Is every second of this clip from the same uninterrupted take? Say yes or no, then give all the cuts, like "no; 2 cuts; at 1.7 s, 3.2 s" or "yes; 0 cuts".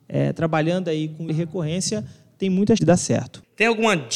no; 2 cuts; at 1.3 s, 2.8 s